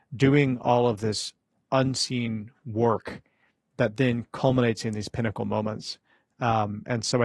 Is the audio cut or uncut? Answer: uncut